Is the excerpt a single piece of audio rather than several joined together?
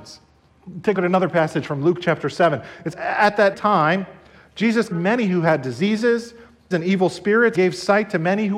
no; 6 cuts; at 0.9 s, 2.9 s, 3.5 s, 4.9 s, 6.7 s, 7.5 s

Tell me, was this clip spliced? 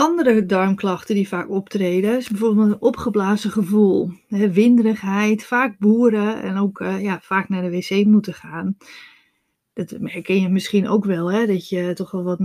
no; 0 cuts

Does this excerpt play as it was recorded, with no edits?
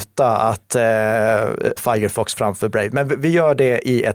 no; 1 cut; at 1.8 s

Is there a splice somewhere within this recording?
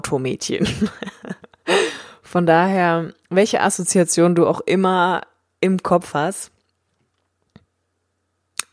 no; 0 cuts

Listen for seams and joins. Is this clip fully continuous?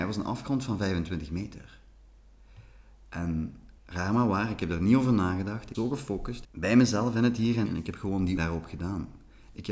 no; 5 cuts; at 3.8 s, 5.7 s, 6.4 s, 7.6 s, 8.4 s

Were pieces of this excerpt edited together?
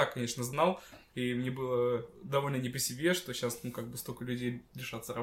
no; 0 cuts

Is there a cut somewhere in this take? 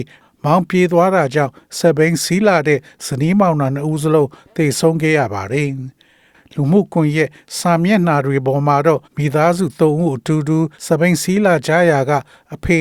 yes; 2 cuts; at 9.0 s, 10.7 s

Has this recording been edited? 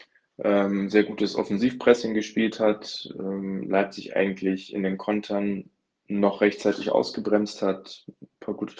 no; 0 cuts

